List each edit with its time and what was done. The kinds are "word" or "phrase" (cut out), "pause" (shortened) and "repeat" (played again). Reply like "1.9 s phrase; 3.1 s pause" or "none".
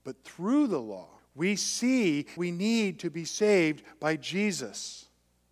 1.2 s pause; 2.4 s word